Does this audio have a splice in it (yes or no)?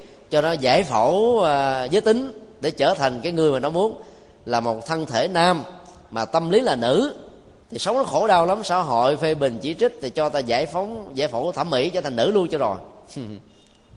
yes